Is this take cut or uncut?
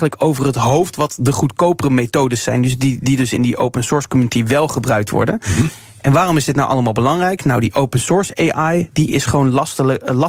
uncut